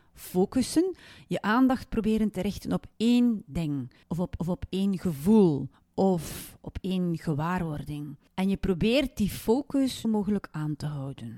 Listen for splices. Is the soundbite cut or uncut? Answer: cut